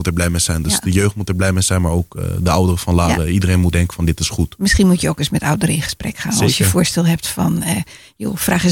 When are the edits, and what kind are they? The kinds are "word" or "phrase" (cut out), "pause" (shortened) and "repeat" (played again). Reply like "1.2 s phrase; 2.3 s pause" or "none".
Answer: 3.7 s word